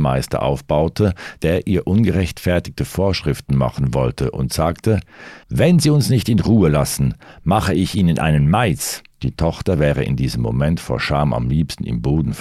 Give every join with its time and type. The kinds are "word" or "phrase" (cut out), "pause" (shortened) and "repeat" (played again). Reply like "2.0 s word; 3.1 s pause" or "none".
5.4 s pause; 9.1 s pause